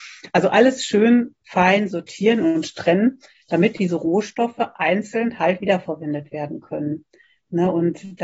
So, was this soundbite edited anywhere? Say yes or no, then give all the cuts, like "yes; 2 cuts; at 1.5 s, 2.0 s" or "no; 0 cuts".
no; 0 cuts